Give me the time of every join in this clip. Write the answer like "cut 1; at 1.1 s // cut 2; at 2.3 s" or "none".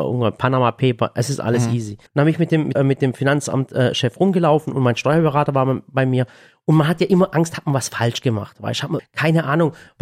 cut 1; at 2.1 s // cut 2; at 2.8 s // cut 3; at 9.0 s